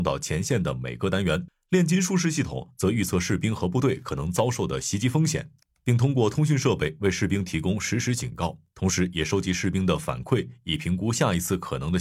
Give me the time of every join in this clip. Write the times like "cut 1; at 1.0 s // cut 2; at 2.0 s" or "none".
none